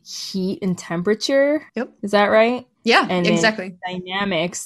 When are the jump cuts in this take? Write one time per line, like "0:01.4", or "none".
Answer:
0:01.7

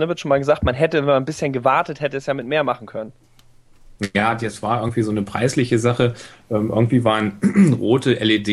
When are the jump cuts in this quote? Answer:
none

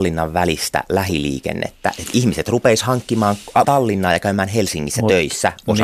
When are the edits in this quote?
0:03.6

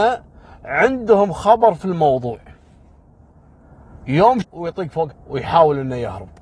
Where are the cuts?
0:04.4
0:05.1

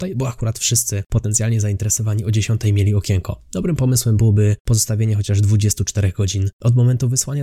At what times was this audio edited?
none

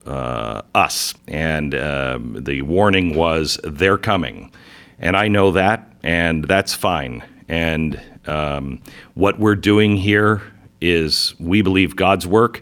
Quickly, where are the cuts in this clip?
0:01.2

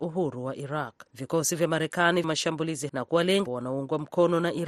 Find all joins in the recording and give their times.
0:01.1
0:02.2
0:02.9
0:03.5

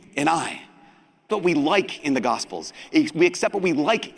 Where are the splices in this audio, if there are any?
0:01.3

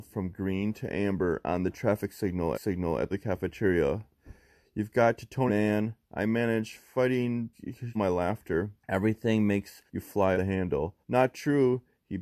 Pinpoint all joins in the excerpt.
0:02.5
0:03.1
0:05.5
0:07.5
0:07.9
0:08.8
0:09.9
0:10.3
0:11.0

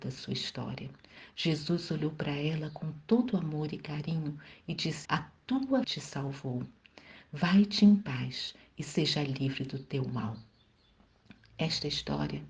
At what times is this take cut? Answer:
0:05.0
0:05.8

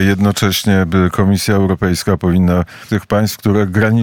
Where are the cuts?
0:02.9

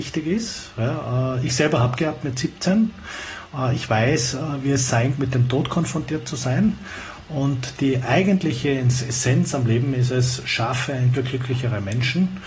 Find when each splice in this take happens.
0:02.0
0:05.1
0:11.1

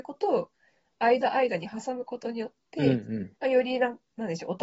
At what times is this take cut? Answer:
0:03.4

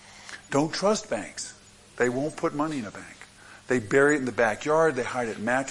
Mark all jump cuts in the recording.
none

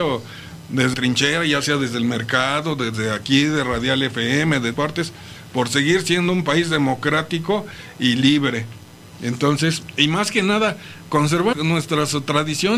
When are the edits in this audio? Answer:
0:00.9
0:04.7
0:11.5

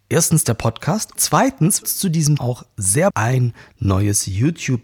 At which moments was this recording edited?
0:01.1
0:01.8
0:02.4
0:03.1

